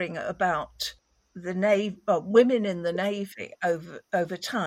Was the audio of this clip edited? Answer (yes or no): no